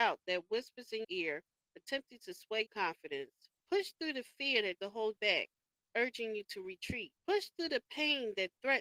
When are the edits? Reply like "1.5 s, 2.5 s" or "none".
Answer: 1.0 s, 2.7 s, 3.6 s, 4.8 s, 5.2 s, 7.2 s